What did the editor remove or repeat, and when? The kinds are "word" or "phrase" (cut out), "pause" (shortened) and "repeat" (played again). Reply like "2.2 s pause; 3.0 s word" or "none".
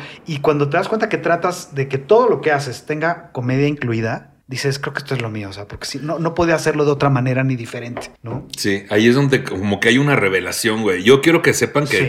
4.4 s pause; 8.2 s pause